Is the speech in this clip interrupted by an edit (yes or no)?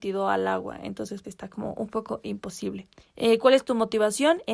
yes